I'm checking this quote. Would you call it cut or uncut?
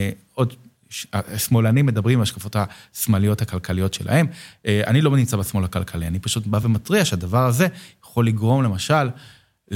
uncut